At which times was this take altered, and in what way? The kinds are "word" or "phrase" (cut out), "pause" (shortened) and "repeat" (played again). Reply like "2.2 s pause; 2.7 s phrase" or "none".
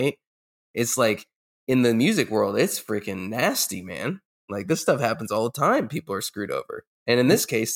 none